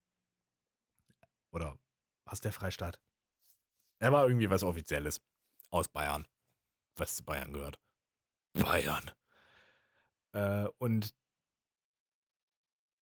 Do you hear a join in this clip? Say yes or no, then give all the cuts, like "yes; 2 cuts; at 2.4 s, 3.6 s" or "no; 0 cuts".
no; 0 cuts